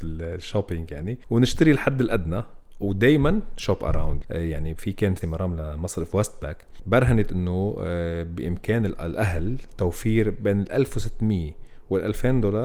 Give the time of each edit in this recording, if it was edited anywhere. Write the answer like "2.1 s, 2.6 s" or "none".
4.2 s, 5.2 s